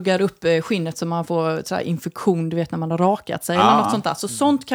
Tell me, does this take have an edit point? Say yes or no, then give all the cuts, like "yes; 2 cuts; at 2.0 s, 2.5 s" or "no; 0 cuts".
no; 0 cuts